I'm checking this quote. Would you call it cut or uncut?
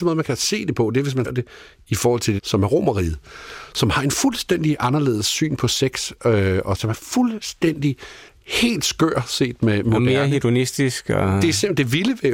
cut